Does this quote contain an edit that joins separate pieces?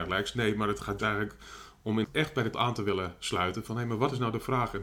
yes; 3 cuts; at 1.0 s, 2.0 s, 2.5 s

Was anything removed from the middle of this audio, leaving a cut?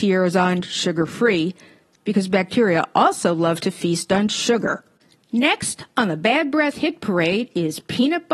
no; 0 cuts

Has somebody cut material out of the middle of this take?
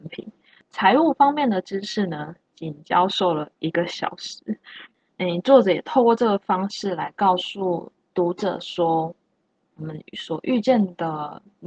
no; 0 cuts

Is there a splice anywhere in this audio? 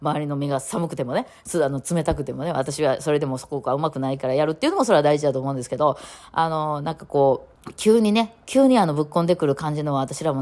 yes; 1 cut; at 7.6 s

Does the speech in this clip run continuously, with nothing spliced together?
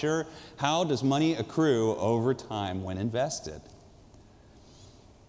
yes; 0 cuts

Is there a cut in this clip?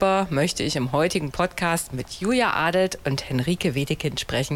no; 0 cuts

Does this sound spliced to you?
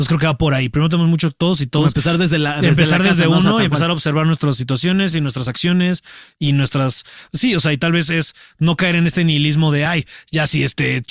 no; 0 cuts

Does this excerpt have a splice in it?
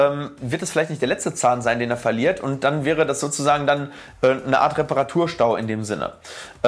no; 0 cuts

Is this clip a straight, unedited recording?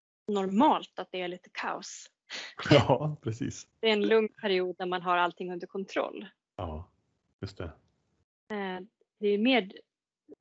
yes; 0 cuts

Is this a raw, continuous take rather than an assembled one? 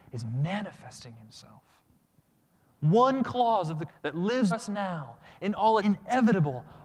no; 3 cuts; at 3.9 s, 4.5 s, 5.8 s

